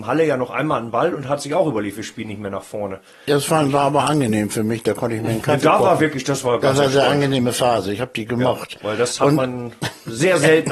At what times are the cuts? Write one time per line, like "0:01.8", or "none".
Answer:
none